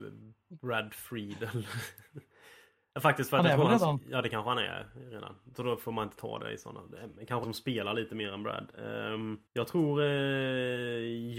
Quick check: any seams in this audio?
yes; 2 cuts; at 7.4 s, 9.5 s

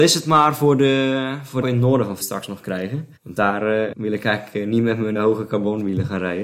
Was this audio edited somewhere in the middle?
yes; 5 cuts; at 1.6 s, 2.2 s, 3.2 s, 3.9 s, 5.1 s

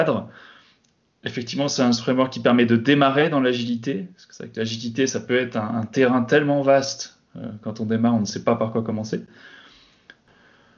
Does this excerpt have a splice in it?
no; 0 cuts

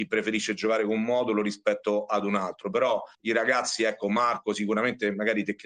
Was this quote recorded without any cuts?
no; 1 cut; at 3.1 s

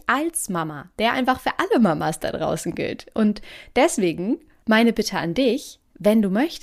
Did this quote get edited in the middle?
no; 0 cuts

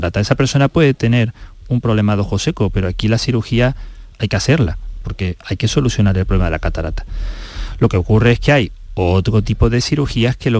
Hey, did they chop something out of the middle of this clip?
no; 0 cuts

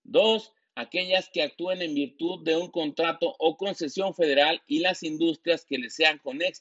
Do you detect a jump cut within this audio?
no; 0 cuts

